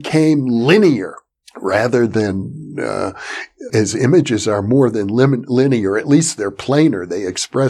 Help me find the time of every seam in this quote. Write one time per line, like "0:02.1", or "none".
0:01.4
0:03.7